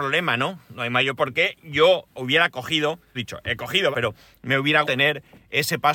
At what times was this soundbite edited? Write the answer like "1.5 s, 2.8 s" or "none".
1.2 s, 2.1 s, 3.1 s, 3.9 s, 4.8 s

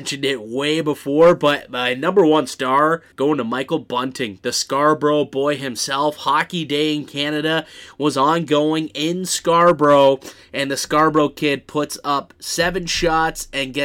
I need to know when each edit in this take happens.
3.1 s

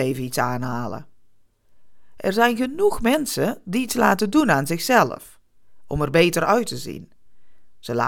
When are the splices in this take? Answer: none

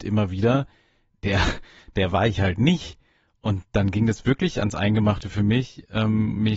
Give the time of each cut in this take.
none

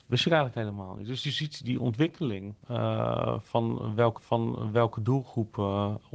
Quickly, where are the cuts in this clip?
1.2 s, 1.6 s, 2.6 s, 4.2 s

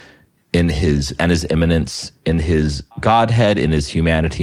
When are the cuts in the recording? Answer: 1.2 s, 2.9 s

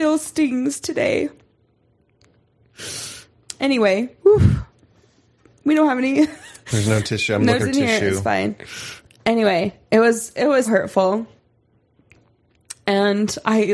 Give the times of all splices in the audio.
4.2 s, 7.6 s, 10.6 s

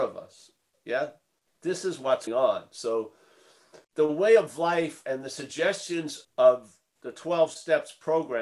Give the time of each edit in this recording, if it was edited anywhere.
1.5 s, 2.3 s, 3.8 s, 6.2 s

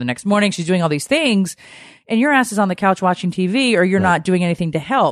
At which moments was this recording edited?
none

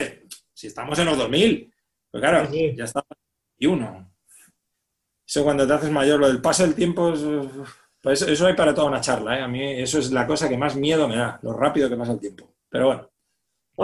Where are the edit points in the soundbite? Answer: none

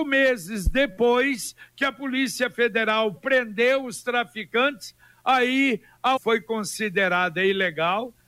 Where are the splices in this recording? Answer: 3.2 s, 6.2 s

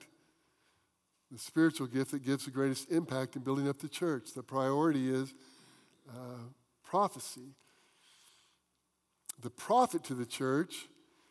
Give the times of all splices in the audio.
none

